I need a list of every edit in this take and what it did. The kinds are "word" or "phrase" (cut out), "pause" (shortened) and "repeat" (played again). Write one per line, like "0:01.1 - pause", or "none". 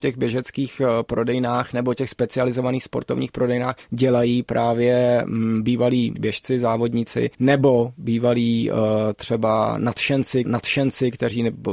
0:03.8 - pause
0:06.2 - word
0:07.3 - pause
0:10.4 - repeat